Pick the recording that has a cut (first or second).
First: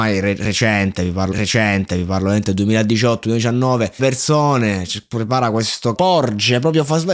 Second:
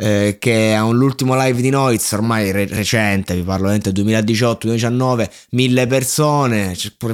first